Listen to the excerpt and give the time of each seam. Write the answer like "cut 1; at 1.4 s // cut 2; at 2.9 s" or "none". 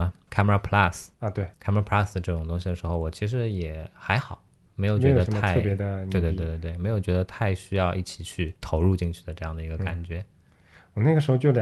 cut 1; at 1.1 s // cut 2; at 1.5 s